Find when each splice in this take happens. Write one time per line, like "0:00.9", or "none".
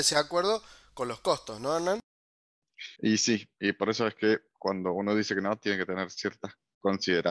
0:03.0

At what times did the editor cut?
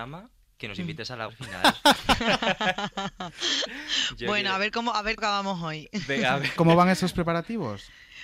0:01.3
0:05.2
0:06.6

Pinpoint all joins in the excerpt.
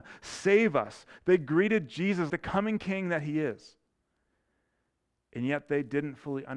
0:02.3

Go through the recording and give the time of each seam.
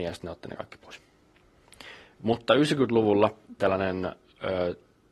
0:03.6

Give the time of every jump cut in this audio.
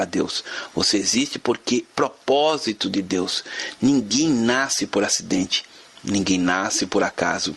0:01.9

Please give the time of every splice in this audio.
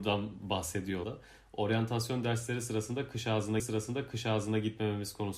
0:01.0
0:03.6

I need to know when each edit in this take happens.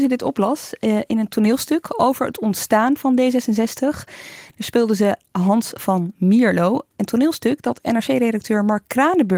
none

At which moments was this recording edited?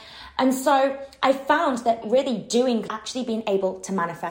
0:02.0
0:02.9

